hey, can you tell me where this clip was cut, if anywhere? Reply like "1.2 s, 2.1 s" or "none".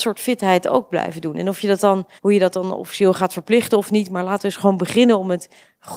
2.2 s

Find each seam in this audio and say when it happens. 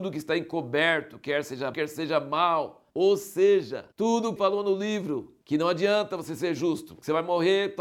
1.7 s, 2.9 s, 3.9 s, 4.4 s, 5.4 s

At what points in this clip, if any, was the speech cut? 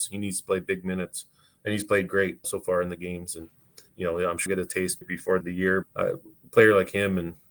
2.4 s, 3.9 s, 4.5 s, 5.0 s, 5.4 s, 5.8 s

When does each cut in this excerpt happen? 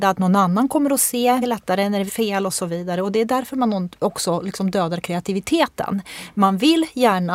1.4 s, 2.1 s

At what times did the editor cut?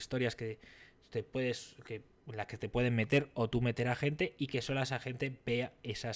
none

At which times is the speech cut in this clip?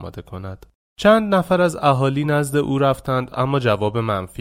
none

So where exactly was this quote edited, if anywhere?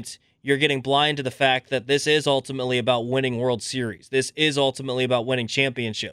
none

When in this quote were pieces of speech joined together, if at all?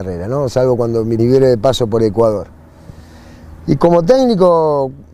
1.2 s

